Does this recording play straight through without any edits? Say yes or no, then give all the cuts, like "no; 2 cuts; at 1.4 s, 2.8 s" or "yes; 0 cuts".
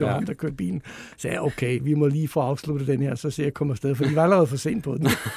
yes; 0 cuts